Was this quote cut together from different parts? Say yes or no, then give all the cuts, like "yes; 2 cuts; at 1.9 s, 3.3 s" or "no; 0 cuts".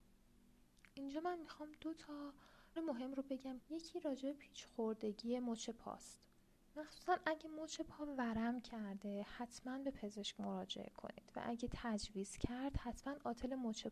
yes; 3 cuts; at 2.8 s, 3.6 s, 6.6 s